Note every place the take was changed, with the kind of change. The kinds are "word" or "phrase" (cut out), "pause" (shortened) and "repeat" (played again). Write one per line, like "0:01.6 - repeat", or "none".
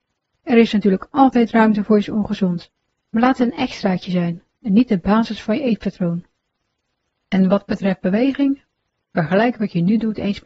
none